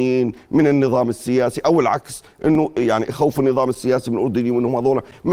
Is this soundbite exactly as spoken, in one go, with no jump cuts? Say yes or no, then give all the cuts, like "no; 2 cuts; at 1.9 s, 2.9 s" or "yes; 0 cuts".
yes; 0 cuts